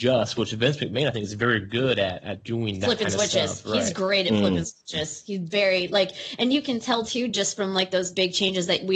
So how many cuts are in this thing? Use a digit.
0